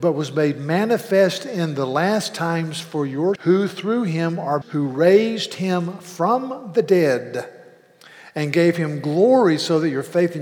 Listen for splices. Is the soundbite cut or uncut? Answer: cut